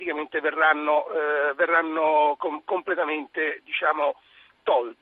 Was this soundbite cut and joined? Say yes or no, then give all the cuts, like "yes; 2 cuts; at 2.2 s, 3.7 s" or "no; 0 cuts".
no; 0 cuts